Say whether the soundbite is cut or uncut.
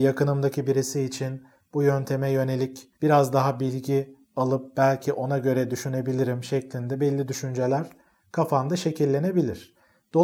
uncut